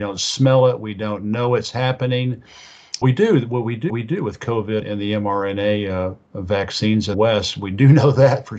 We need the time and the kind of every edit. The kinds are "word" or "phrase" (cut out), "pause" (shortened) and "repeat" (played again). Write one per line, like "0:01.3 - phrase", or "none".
0:03.0 - word
0:03.9 - repeat
0:04.8 - word
0:07.1 - word